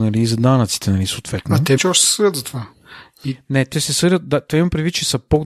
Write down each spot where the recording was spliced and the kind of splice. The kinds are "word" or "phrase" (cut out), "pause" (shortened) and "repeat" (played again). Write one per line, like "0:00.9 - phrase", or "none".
0:01.8 - word
0:03.7 - word